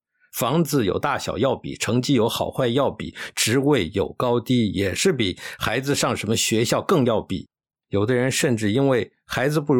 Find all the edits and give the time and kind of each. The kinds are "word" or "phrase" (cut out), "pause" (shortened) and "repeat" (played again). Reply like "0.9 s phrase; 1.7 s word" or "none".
none